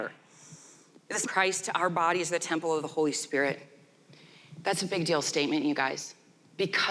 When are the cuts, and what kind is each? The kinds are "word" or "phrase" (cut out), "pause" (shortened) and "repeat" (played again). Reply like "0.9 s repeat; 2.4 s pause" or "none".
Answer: 1.2 s phrase